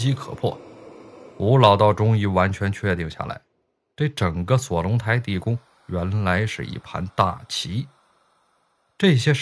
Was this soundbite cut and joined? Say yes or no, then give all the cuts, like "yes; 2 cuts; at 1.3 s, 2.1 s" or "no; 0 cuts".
yes; 1 cut; at 1.3 s